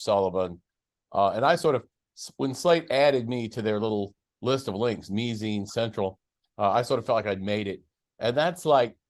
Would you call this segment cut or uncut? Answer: uncut